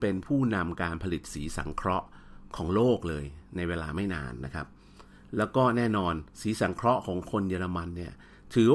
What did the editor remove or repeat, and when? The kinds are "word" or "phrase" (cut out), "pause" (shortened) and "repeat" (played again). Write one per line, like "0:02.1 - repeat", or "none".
0:06.3 - pause